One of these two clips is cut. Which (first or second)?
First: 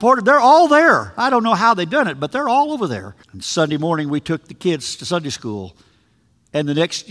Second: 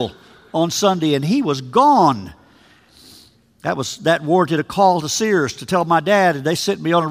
first